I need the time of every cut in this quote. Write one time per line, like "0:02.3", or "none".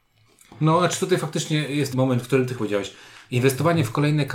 0:01.9
0:02.6